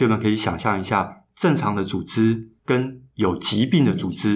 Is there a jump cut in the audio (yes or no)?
yes